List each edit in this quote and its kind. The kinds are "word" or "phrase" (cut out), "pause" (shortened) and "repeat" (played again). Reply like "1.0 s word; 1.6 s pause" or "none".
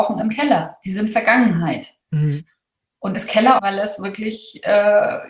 2.0 s pause; 3.1 s word; 3.6 s phrase

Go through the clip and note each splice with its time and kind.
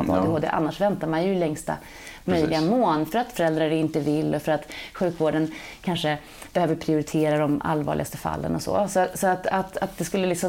none

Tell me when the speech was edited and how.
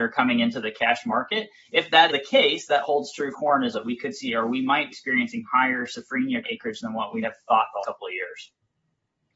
2.1 s word; 2.8 s word; 3.3 s word; 3.7 s word; 4.3 s word; 4.9 s word; 6.4 s word; 7.2 s word; 7.8 s word

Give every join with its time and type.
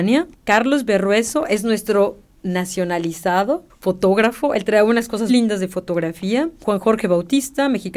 5.3 s word

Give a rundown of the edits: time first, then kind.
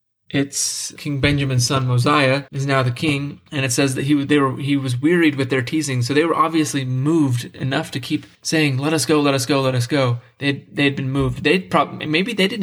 1.0 s word; 2.5 s pause; 3.5 s pause; 8.3 s pause

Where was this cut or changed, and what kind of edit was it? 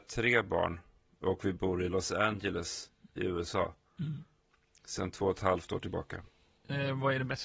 none

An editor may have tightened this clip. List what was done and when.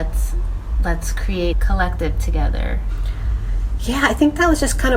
1.5 s word

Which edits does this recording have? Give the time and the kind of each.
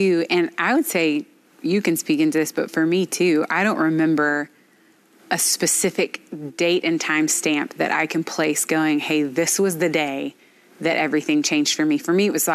none

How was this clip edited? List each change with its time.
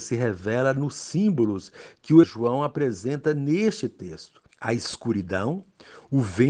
2.2 s word; 4.5 s pause

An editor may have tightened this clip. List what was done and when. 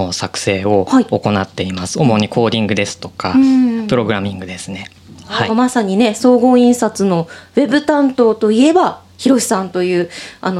5.5 s phrase

